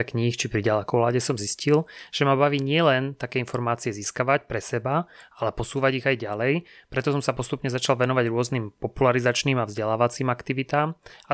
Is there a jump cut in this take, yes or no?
no